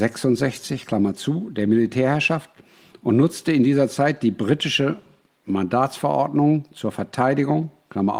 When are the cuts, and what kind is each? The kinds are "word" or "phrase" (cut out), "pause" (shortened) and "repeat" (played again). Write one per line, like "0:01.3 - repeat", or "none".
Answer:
none